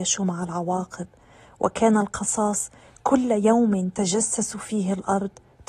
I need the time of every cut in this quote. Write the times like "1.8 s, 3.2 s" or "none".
none